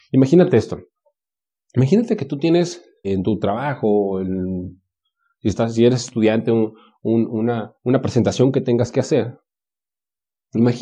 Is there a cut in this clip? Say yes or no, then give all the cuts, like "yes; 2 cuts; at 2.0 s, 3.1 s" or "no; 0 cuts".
yes; 1 cut; at 3.0 s